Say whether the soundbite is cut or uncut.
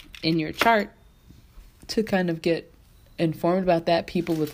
uncut